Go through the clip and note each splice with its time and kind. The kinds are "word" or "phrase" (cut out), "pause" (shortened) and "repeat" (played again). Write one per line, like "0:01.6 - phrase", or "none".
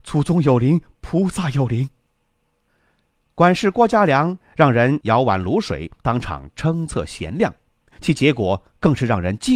0:02.1 - pause